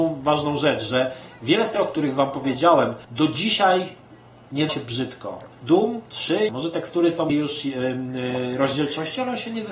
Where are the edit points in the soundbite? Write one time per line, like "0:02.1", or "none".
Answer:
0:01.7
0:03.0
0:04.7
0:05.5
0:06.5
0:07.3

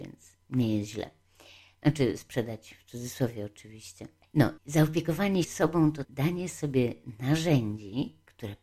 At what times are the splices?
0:04.6
0:05.4
0:06.0

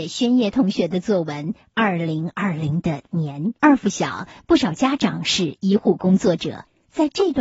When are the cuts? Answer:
0:03.6

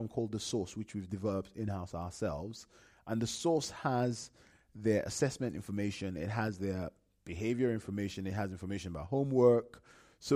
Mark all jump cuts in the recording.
none

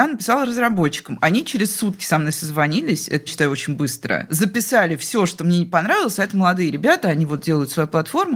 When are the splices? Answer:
0:03.3

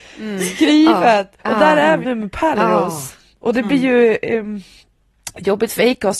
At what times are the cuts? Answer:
0:01.4
0:02.0

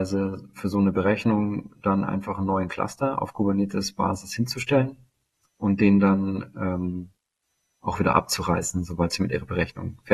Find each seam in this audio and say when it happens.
none

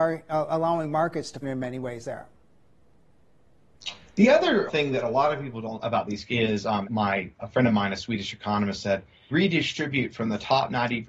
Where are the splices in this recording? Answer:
0:01.4
0:04.7
0:05.8
0:06.3
0:06.8
0:09.3

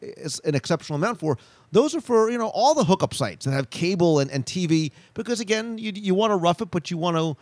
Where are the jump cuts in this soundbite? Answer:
none

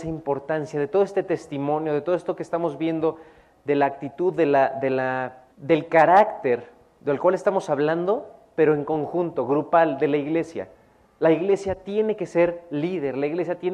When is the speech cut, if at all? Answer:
0:05.5

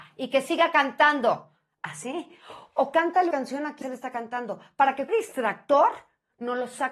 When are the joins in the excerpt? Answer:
0:03.3
0:03.8
0:05.1

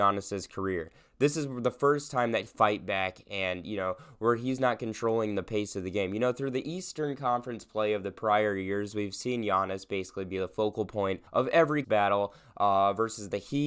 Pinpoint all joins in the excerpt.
0:02.5
0:11.3
0:11.8

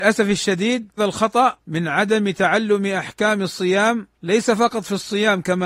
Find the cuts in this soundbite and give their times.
0:01.0
0:04.1

